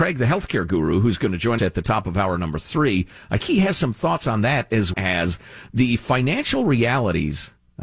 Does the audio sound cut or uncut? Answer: cut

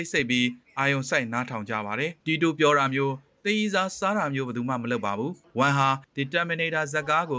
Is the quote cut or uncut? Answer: uncut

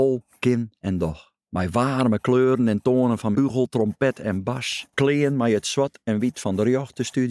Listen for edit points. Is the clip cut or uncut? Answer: cut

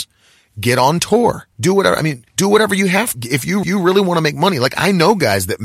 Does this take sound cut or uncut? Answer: cut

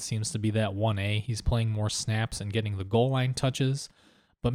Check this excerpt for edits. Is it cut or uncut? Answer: uncut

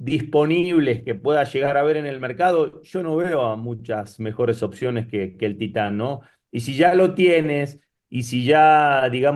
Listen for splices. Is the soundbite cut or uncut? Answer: uncut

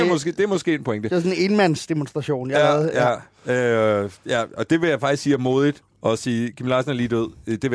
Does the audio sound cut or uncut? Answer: uncut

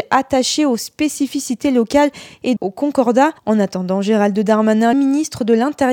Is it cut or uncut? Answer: cut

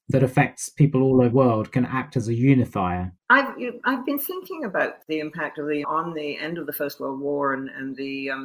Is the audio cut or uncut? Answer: cut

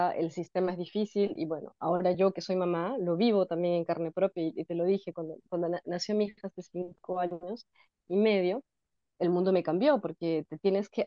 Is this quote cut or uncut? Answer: uncut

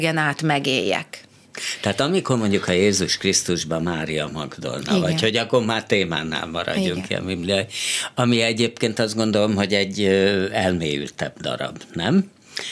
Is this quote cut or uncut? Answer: uncut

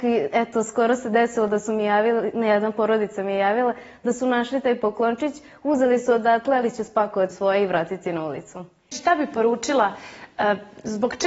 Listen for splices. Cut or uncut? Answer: cut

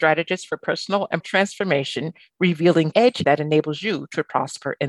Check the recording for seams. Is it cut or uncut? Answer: cut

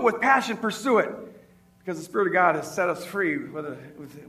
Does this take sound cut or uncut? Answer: uncut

